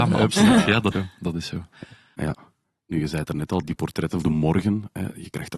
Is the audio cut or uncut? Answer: cut